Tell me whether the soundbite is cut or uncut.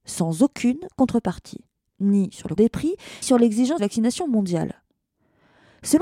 cut